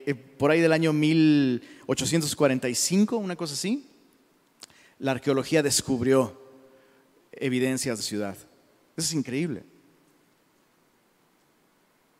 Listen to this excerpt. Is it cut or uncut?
cut